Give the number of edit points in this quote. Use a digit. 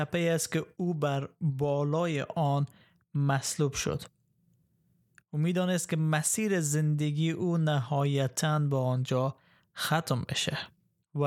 0